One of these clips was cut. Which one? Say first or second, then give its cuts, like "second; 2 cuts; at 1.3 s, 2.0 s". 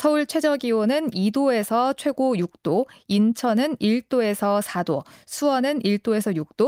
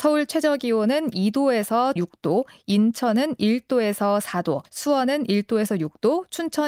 second; 2 cuts; at 2.0 s, 4.6 s